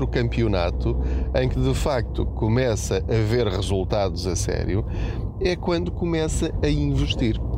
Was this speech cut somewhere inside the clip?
no; 0 cuts

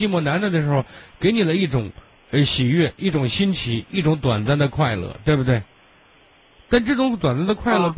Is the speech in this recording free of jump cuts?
yes; 0 cuts

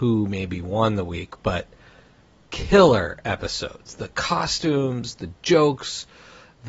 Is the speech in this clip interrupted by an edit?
no; 0 cuts

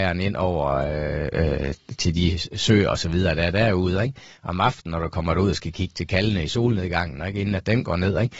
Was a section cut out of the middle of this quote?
no; 0 cuts

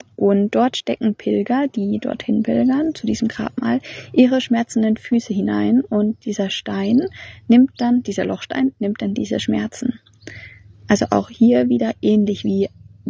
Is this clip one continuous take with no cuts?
yes; 0 cuts

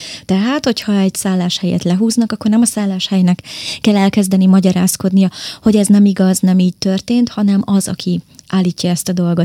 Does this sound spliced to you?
no; 0 cuts

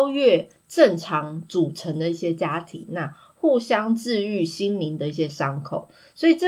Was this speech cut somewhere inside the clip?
no; 0 cuts

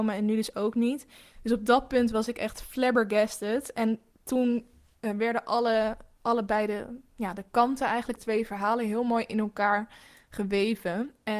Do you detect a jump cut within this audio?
yes; 1 cut; at 8.2 s

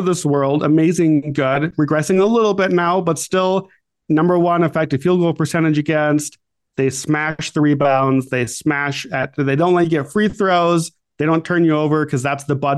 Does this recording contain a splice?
no; 0 cuts

